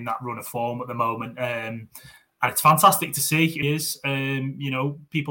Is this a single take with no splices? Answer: no; 1 cut; at 3.6 s

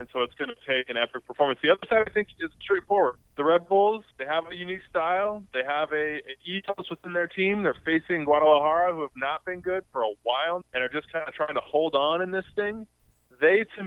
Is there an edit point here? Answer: yes; 4 cuts; at 2.6 s, 3.3 s, 4.1 s, 10.6 s

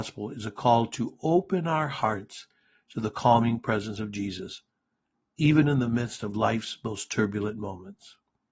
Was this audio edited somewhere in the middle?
no; 0 cuts

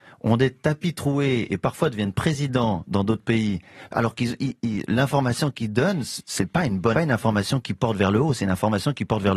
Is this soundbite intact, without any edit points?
no; 1 cut; at 7.0 s

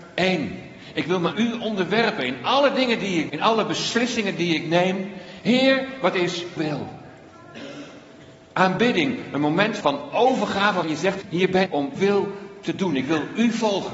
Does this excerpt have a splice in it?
yes; 8 cuts; at 1.3 s, 3.3 s, 6.6 s, 9.8 s, 10.8 s, 11.2 s, 11.7 s, 12.0 s

